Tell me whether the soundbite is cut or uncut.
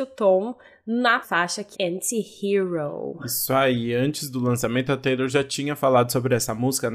cut